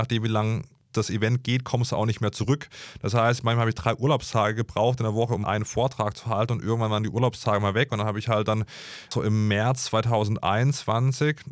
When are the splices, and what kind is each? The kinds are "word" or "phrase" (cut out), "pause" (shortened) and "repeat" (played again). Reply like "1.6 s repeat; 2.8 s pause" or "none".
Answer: 5.4 s word

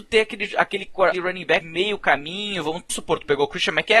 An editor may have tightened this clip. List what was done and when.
1.1 s word; 1.6 s word; 2.9 s word

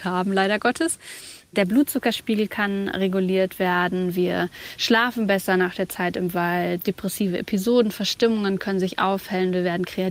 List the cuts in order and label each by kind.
none

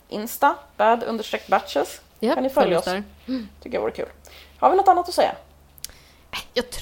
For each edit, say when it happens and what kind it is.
2.1 s pause; 3.2 s pause

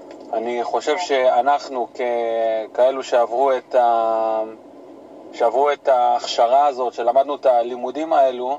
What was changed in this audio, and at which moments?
none

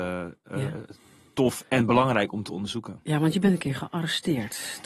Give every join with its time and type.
none

